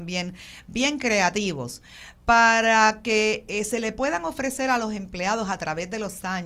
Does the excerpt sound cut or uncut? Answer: uncut